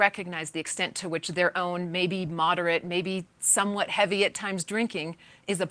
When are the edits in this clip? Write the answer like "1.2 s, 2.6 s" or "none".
none